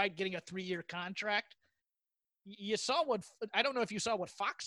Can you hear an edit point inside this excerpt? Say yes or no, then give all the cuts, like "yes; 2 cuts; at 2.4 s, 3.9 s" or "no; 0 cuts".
no; 0 cuts